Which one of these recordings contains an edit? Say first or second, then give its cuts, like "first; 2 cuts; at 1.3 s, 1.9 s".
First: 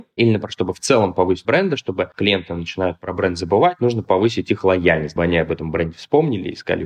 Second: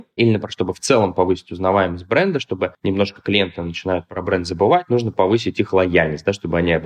first; 3 cuts; at 1.4 s, 2.1 s, 5.2 s